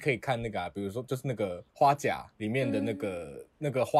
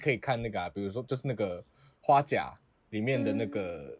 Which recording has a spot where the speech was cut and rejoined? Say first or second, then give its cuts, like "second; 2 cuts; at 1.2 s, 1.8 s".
first; 2 cuts; at 1.7 s, 2.3 s